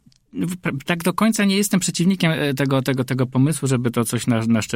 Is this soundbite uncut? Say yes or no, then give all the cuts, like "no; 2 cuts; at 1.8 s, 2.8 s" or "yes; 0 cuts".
yes; 0 cuts